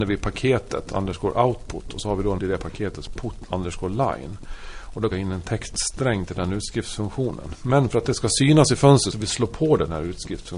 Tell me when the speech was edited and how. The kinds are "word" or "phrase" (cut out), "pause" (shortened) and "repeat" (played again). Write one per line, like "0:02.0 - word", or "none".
0:00.9 - word
0:02.4 - word
0:03.1 - word
0:05.1 - phrase
0:09.1 - phrase